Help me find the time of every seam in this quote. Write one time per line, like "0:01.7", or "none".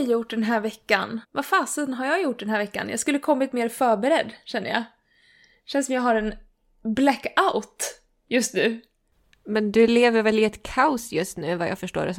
0:01.2